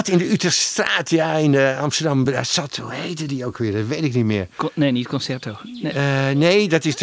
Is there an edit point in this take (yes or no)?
no